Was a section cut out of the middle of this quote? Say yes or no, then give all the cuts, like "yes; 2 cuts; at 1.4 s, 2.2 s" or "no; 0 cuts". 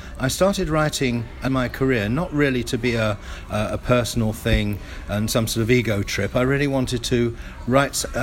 yes; 1 cut; at 1.5 s